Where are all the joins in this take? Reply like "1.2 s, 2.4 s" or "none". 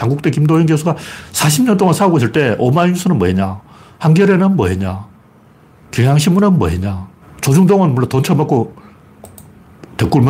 7.2 s